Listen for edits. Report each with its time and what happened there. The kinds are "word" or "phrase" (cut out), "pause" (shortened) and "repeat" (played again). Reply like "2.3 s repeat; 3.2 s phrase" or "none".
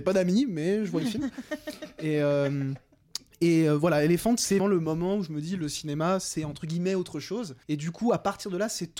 1.0 s word; 4.6 s word; 7.6 s pause